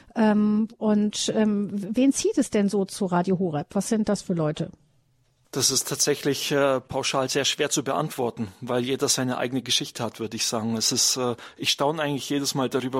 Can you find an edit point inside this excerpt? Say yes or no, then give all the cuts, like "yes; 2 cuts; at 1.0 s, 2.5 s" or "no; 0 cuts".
no; 0 cuts